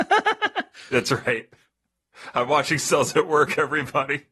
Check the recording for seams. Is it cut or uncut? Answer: uncut